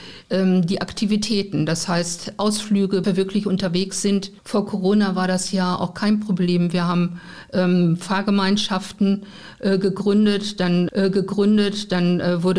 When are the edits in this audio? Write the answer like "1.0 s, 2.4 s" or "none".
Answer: 3.0 s, 4.4 s, 10.9 s